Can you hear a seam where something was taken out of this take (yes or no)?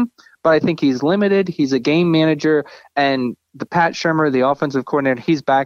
no